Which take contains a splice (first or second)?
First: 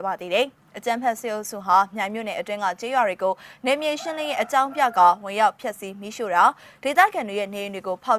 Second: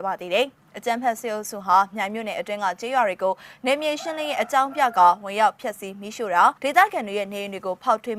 second